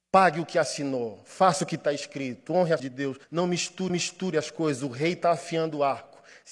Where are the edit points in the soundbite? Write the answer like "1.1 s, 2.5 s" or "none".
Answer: 2.8 s, 3.2 s, 3.9 s

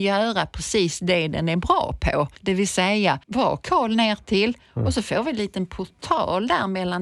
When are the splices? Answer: 2.4 s, 3.2 s

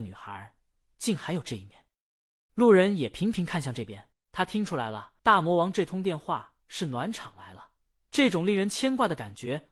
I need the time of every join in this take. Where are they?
4.1 s, 5.2 s

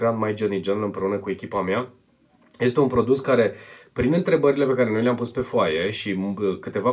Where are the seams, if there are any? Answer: none

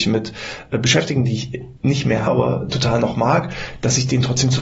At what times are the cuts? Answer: 1.8 s, 2.3 s

